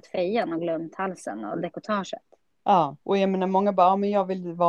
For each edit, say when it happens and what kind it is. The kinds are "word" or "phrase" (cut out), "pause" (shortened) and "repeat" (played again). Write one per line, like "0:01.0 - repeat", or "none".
0:03.0 - pause